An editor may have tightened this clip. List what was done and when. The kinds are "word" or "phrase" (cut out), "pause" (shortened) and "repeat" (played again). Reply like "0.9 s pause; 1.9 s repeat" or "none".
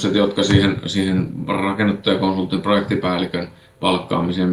none